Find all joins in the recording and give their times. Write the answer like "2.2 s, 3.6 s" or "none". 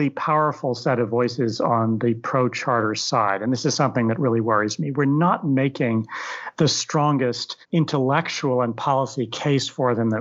7.6 s